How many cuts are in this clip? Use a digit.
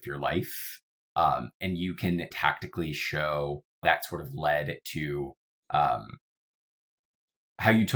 2